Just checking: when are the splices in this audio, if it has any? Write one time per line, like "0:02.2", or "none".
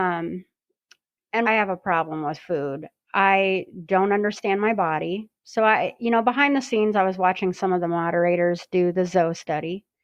0:01.5

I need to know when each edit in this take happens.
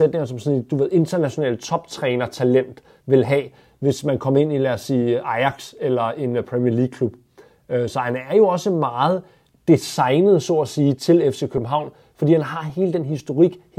none

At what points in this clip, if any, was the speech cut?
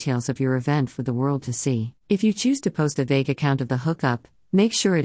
0:02.0

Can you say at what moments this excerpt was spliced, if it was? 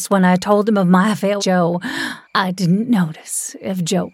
0:01.4
0:02.2

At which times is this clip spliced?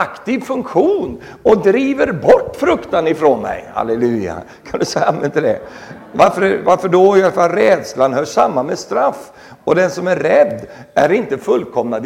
none

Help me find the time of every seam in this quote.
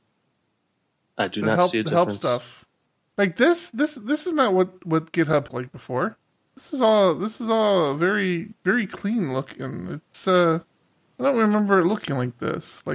0:05.5
0:08.6

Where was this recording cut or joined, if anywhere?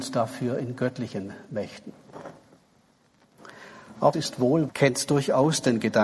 0:04.1
0:04.7

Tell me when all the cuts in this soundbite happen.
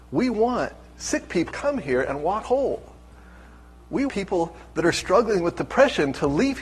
0:01.5
0:02.4
0:04.1

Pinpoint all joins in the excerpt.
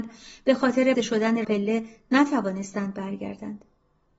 0:00.9
0:01.4

